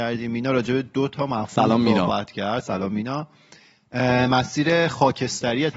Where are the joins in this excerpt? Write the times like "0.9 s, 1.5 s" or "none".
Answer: none